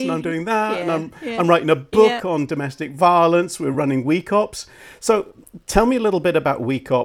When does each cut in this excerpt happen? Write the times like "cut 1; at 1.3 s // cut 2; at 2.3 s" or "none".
none